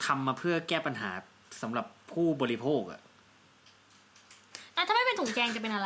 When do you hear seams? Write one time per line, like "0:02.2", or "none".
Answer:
none